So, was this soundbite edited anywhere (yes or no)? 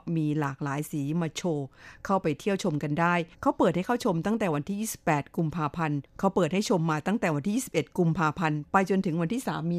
yes